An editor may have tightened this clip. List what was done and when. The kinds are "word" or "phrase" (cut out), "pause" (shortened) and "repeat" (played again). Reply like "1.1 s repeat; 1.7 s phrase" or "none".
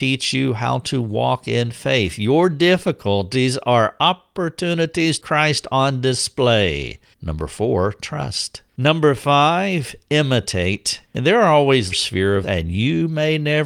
5.2 s phrase; 7.1 s pause; 8.7 s pause; 11.1 s pause; 11.9 s phrase; 12.4 s word